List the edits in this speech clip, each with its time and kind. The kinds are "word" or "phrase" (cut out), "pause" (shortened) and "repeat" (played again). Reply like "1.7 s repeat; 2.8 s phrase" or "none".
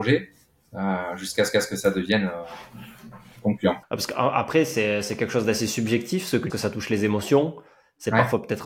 1.5 s repeat; 3.8 s pause; 6.5 s phrase